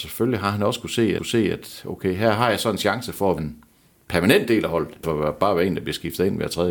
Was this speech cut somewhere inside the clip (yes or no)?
yes